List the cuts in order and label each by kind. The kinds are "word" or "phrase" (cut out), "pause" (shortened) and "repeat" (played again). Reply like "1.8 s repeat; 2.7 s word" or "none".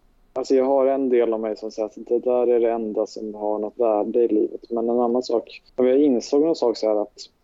1.7 s word; 3.7 s word; 5.7 s pause